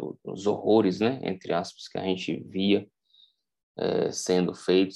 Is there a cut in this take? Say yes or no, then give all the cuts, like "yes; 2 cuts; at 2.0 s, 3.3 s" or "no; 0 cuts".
no; 0 cuts